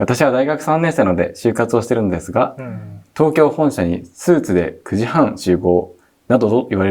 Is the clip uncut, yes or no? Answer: no